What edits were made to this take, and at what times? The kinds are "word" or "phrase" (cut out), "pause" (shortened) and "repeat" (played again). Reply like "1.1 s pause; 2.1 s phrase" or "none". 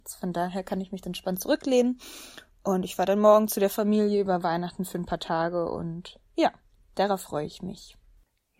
1.0 s word